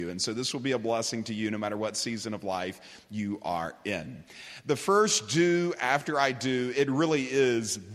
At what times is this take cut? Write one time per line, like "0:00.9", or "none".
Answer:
none